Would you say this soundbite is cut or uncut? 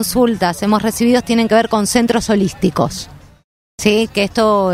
uncut